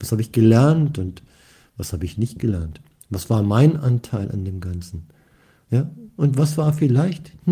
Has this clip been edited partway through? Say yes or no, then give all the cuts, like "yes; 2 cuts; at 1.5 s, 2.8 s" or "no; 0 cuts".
no; 0 cuts